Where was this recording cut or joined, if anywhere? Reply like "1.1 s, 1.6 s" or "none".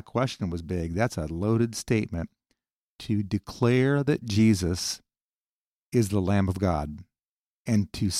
none